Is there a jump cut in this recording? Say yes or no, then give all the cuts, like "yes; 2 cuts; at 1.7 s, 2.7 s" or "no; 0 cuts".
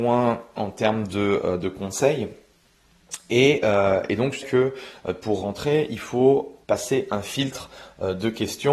yes; 2 cuts; at 4.4 s, 6.6 s